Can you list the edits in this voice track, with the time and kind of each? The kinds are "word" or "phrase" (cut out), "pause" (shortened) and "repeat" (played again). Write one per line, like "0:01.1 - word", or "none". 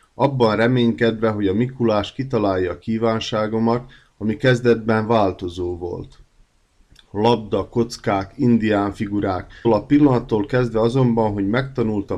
0:09.6 - word